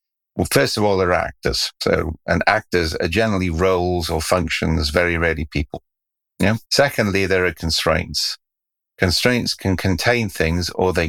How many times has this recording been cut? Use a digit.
2